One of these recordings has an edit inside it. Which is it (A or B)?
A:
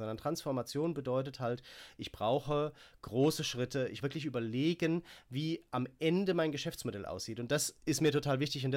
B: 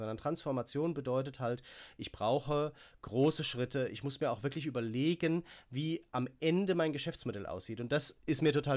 A